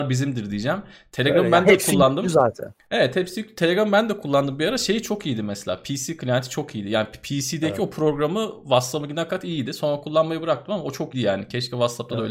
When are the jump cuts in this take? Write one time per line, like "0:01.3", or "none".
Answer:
0:09.3
0:11.1